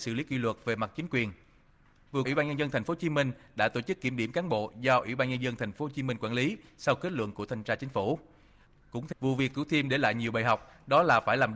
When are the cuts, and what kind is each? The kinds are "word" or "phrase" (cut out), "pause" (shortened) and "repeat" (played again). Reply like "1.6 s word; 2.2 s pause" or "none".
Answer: 2.2 s word; 9.1 s phrase